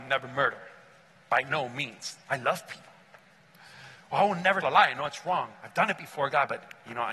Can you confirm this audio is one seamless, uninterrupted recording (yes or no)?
no